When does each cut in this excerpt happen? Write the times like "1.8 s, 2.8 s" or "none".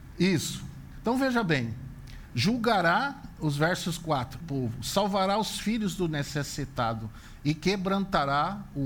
4.4 s